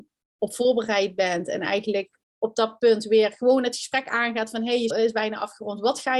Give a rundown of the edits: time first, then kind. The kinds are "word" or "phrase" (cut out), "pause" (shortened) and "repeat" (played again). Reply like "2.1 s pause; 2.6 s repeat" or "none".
2.2 s pause; 4.9 s word

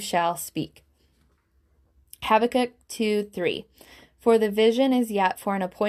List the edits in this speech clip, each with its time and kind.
none

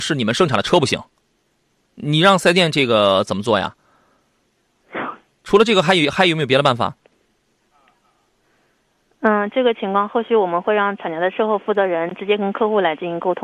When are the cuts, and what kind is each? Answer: none

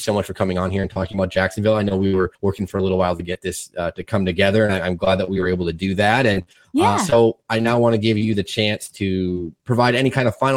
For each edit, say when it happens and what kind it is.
2.4 s pause; 9.6 s pause

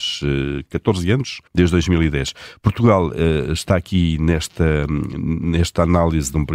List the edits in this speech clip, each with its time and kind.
1.5 s pause

